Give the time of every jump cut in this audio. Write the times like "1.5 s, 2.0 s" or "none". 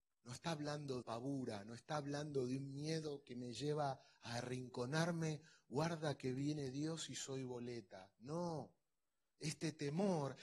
1.0 s